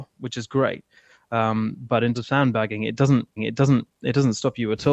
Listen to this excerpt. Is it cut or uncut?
cut